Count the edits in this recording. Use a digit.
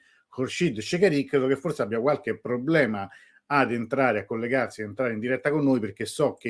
0